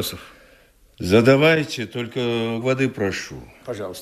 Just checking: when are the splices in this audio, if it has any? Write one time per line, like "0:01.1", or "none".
0:02.6